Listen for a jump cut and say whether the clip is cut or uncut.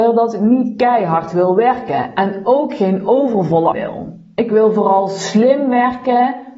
cut